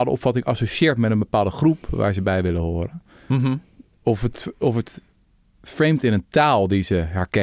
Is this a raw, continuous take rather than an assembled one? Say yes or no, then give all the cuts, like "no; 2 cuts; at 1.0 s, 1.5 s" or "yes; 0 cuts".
yes; 0 cuts